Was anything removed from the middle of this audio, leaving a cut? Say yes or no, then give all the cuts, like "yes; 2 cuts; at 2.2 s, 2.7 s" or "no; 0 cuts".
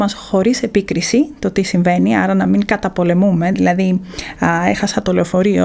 no; 0 cuts